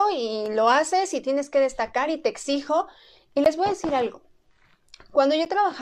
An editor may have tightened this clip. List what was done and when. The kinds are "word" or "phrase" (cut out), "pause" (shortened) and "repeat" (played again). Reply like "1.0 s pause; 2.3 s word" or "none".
none